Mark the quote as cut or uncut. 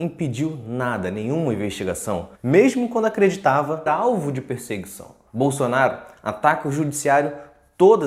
cut